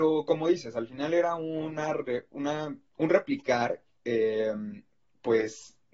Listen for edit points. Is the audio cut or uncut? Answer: uncut